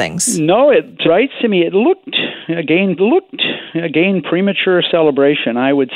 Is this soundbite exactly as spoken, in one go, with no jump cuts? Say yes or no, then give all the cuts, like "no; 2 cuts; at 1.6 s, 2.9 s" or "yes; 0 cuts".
no; 2 cuts; at 1.0 s, 3.0 s